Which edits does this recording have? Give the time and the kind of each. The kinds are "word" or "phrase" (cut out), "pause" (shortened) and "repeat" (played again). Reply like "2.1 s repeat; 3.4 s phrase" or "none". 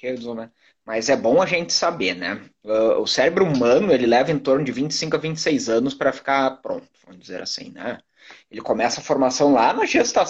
none